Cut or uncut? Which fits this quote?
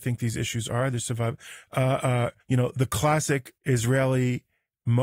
cut